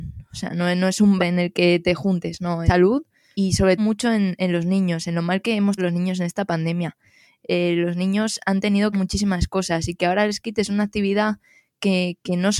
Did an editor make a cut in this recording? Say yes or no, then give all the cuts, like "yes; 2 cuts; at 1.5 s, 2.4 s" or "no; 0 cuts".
yes; 6 cuts; at 1.2 s, 2.7 s, 3.3 s, 3.8 s, 5.8 s, 8.9 s